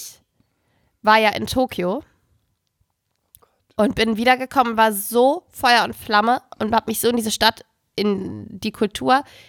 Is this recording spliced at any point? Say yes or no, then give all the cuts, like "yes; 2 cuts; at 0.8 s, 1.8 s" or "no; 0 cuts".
no; 0 cuts